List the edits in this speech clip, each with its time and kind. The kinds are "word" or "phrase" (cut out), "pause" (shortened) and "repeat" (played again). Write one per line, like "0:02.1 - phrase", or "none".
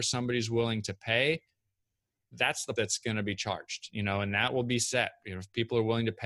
0:02.8 - word